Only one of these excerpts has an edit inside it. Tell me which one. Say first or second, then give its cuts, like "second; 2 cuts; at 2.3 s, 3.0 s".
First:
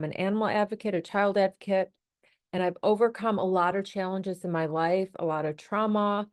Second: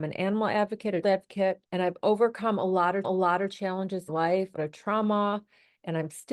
second; 5 cuts; at 1.0 s, 1.7 s, 3.0 s, 4.1 s, 4.6 s